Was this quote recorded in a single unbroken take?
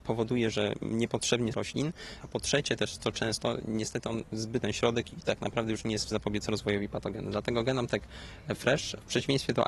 no; 3 cuts; at 1.5 s, 4.6 s, 6.1 s

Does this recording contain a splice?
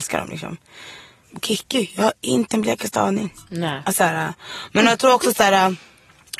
no; 0 cuts

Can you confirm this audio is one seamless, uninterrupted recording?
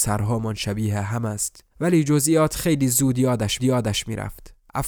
no; 2 cuts; at 1.7 s, 3.6 s

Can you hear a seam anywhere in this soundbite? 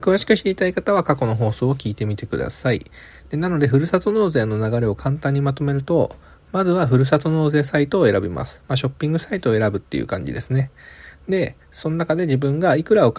no; 0 cuts

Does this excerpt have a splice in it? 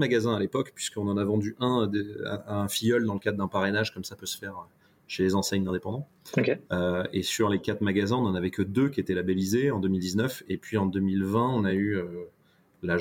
no; 0 cuts

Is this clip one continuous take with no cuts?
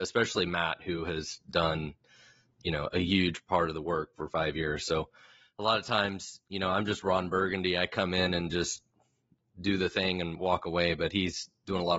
yes; 0 cuts

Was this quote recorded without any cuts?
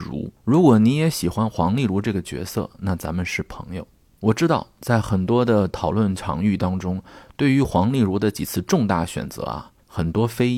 yes; 0 cuts

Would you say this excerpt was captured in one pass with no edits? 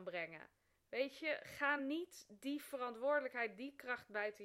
yes; 0 cuts

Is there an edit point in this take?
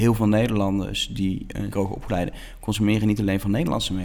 yes; 1 cut; at 1.7 s

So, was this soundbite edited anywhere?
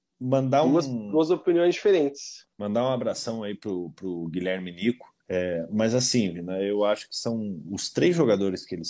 yes; 2 cuts; at 2.5 s, 5.2 s

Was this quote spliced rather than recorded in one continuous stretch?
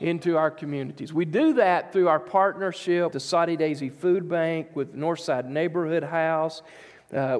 yes; 1 cut; at 3.1 s

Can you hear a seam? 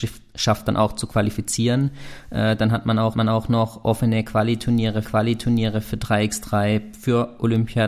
yes; 2 cuts; at 3.1 s, 5.0 s

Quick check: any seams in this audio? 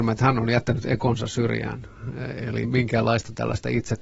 yes; 1 cut; at 2.6 s

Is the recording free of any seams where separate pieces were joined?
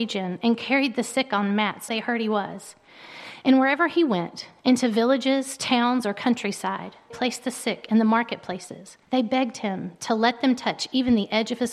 no; 3 cuts; at 1.9 s, 7.1 s, 9.0 s

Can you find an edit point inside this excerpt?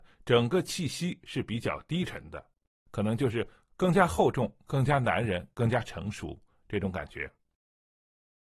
no; 0 cuts

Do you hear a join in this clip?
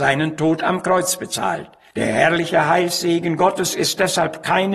no; 0 cuts

